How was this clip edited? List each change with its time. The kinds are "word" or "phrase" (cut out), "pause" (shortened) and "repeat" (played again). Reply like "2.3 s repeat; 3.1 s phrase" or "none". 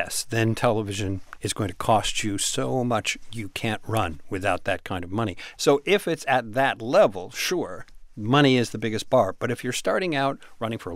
none